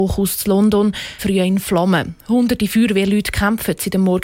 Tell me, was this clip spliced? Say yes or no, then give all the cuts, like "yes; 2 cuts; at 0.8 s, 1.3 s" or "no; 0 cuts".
yes; 1 cut; at 1.2 s